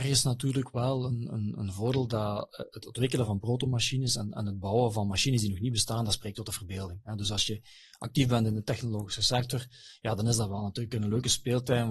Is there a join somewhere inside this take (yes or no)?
no